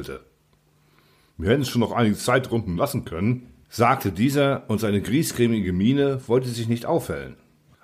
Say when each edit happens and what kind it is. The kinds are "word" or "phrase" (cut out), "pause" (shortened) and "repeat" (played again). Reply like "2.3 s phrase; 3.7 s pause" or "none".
none